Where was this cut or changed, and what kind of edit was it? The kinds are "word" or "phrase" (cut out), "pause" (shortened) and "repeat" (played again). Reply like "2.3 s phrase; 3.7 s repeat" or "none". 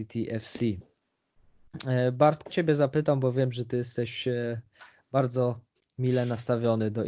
2.5 s word; 5.8 s pause